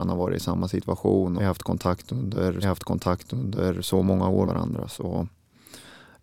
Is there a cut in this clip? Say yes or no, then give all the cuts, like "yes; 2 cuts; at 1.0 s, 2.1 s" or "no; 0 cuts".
yes; 3 cuts; at 1.4 s, 2.6 s, 4.5 s